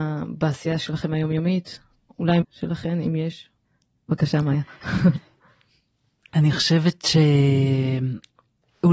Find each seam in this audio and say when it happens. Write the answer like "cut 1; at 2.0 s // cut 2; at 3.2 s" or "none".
cut 1; at 2.4 s